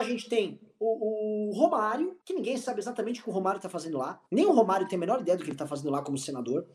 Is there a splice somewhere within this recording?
yes; 2 cuts; at 2.2 s, 4.3 s

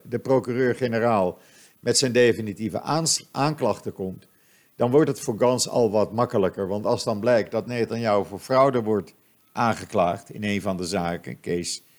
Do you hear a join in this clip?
no; 0 cuts

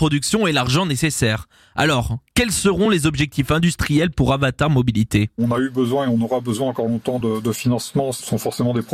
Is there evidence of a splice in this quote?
no; 0 cuts

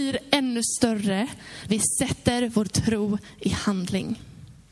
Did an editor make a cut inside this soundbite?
yes; 1 cut; at 1.7 s

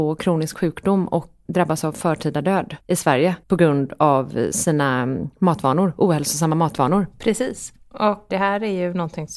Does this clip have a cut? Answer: yes; 4 cuts; at 1.5 s, 2.8 s, 3.4 s, 8.3 s

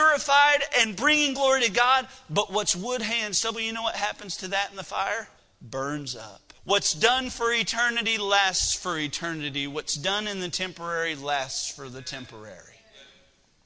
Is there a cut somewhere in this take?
yes; 2 cuts; at 5.4 s, 6.5 s

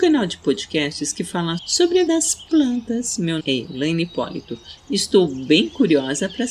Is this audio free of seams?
no; 3 cuts; at 1.6 s, 2.1 s, 3.4 s

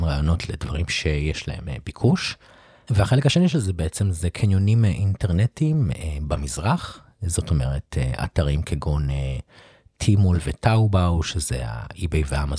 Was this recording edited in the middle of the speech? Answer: no; 0 cuts

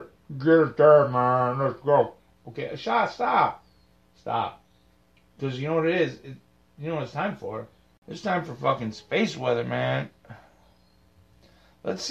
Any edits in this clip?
no; 0 cuts

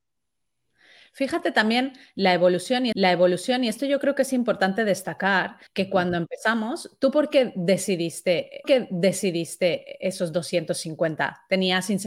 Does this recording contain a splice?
yes; 3 cuts; at 2.9 s, 5.7 s, 8.6 s

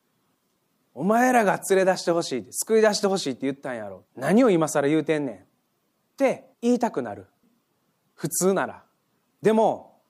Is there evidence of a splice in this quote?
yes; 2 cuts; at 4.1 s, 6.5 s

